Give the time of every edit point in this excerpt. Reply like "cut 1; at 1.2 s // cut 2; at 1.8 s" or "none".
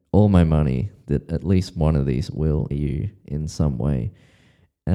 cut 1; at 2.3 s // cut 2; at 2.7 s